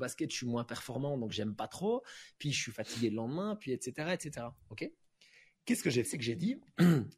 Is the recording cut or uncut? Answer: cut